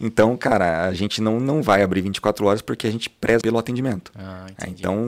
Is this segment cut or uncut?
cut